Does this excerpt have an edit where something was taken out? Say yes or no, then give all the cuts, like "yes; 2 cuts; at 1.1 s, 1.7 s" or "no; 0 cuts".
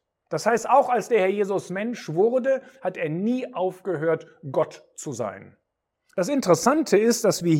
no; 0 cuts